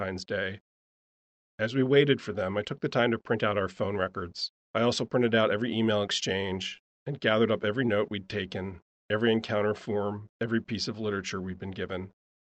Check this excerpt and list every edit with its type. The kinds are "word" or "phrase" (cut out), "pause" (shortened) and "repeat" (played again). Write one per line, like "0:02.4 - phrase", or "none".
0:04.6 - pause
0:10.3 - pause